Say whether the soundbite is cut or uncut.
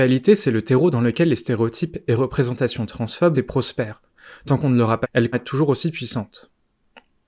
cut